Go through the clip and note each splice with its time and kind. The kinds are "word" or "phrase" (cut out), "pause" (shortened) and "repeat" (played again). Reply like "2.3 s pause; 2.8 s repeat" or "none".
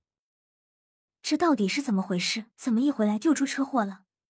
2.5 s pause